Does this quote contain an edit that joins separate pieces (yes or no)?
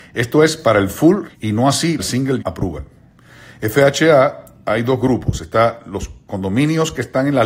yes